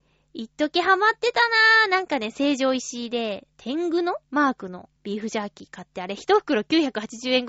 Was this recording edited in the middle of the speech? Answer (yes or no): yes